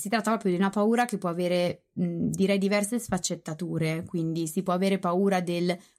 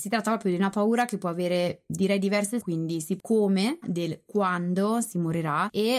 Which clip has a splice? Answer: second; 4 cuts; at 1.9 s, 2.6 s, 3.2 s, 3.8 s

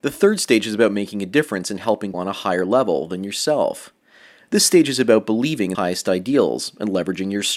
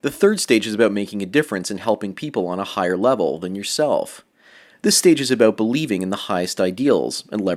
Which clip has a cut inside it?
first; 2 cuts; at 2.1 s, 5.7 s

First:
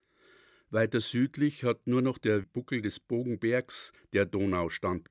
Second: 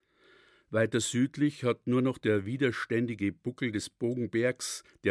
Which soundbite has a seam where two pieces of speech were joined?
first; 1 cut; at 2.4 s

